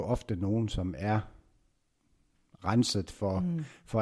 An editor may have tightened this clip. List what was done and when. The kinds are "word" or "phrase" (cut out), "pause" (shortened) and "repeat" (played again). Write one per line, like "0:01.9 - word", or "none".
none

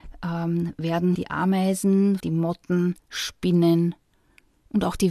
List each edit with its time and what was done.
0:01.1 - word
0:02.2 - word
0:03.0 - pause

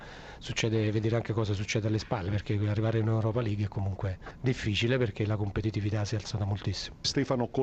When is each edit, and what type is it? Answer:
none

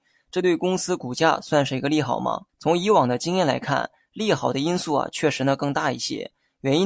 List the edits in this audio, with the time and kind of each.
0:02.5 - pause

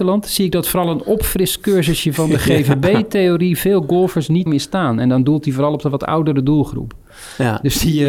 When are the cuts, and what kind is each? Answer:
0:04.5 - word

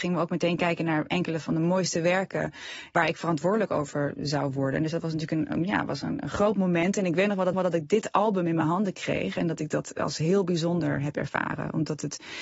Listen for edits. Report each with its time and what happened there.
0:07.5 - repeat

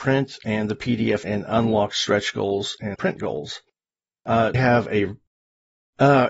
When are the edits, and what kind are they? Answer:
0:01.2 - word
0:02.9 - word
0:04.5 - word

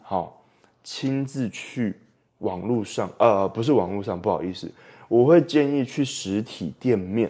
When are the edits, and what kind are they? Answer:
none

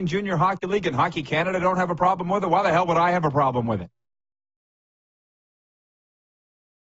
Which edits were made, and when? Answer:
none

